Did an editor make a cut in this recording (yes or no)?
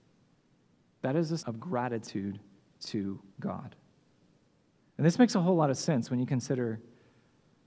yes